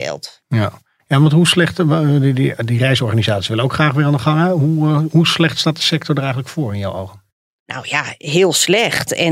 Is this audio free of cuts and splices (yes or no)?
yes